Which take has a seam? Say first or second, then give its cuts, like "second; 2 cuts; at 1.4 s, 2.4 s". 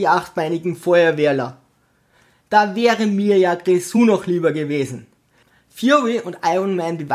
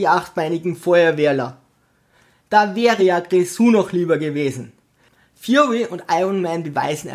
second; 1 cut; at 3.0 s